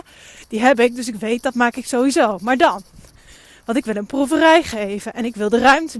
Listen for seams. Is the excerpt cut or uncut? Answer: uncut